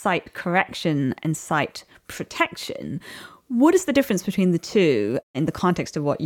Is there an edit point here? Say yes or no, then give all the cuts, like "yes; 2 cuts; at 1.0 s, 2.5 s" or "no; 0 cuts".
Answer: no; 0 cuts